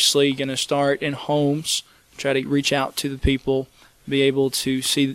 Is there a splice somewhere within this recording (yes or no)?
no